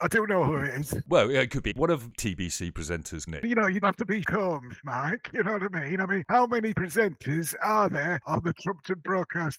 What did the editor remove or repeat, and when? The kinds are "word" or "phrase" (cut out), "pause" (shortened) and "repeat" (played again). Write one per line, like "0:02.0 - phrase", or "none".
0:01.7 - word
0:02.1 - word
0:03.3 - word
0:03.8 - word
0:04.2 - word
0:06.7 - word